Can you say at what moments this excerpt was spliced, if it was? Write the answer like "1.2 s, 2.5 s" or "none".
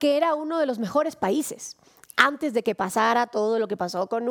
none